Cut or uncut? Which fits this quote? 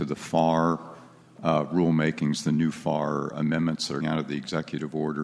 cut